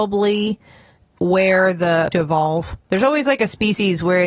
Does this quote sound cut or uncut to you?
cut